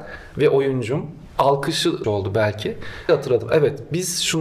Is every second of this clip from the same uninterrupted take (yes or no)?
no